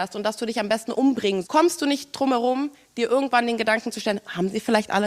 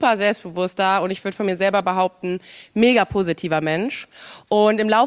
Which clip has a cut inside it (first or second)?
first